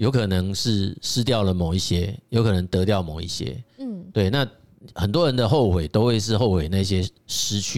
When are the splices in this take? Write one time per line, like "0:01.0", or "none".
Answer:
none